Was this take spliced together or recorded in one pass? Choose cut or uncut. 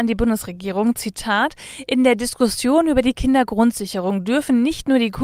uncut